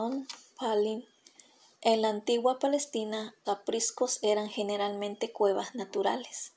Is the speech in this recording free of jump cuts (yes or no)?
no